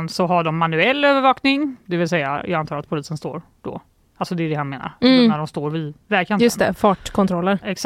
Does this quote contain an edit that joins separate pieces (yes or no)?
no